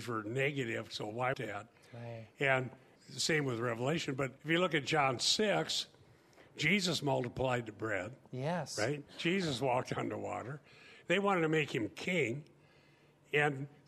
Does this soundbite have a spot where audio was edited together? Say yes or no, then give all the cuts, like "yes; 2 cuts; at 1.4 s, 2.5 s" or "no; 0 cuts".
yes; 4 cuts; at 1.3 s, 3.0 s, 4.4 s, 9.1 s